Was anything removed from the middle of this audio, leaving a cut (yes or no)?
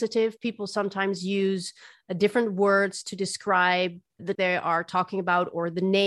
yes